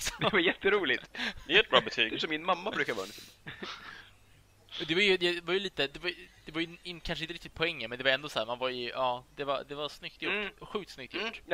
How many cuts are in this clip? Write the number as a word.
one